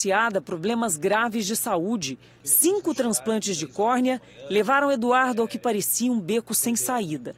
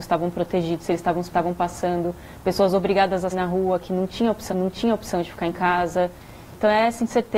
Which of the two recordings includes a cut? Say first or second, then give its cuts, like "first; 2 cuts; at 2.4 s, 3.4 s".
second; 3 cuts; at 1.3 s, 3.3 s, 4.5 s